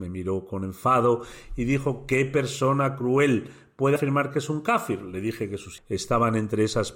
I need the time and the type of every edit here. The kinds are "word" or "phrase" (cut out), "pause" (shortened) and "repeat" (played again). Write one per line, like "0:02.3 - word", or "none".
0:05.8 - word